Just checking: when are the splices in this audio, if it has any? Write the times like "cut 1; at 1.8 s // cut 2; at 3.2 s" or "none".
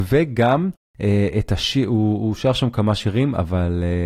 none